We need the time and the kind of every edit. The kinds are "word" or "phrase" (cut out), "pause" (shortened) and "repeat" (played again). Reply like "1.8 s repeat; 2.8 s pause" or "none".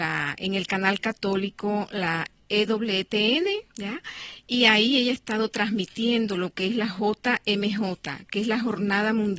3.7 s pause